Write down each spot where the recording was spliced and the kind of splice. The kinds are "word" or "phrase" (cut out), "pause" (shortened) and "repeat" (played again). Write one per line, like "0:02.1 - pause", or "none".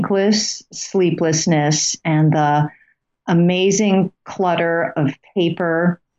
none